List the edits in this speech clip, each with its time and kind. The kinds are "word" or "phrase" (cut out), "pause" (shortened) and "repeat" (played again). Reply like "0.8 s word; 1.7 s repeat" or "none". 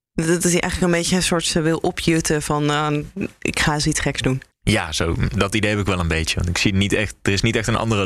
4.5 s pause